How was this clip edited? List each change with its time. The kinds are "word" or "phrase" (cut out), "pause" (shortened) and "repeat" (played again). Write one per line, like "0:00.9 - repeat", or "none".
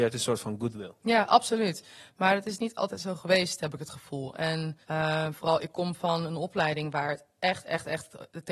0:04.8 - pause

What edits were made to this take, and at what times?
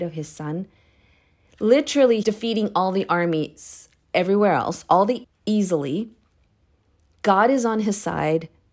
0:02.2 - word
0:05.2 - word

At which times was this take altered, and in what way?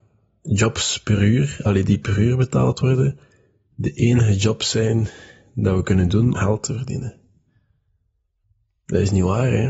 0:06.3 - word

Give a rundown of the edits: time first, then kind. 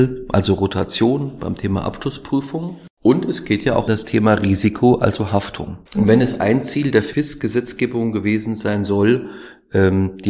0:02.9 - pause
0:03.9 - word
0:05.9 - pause

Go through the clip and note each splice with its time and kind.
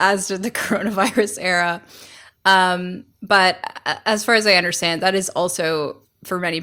none

